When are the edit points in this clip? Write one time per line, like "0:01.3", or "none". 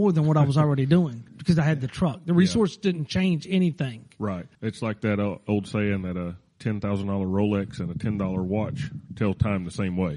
0:01.3
0:04.5